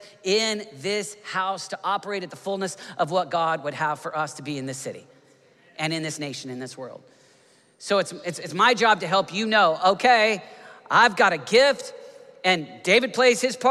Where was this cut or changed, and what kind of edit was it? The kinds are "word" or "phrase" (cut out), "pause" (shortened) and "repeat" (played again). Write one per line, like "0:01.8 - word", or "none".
none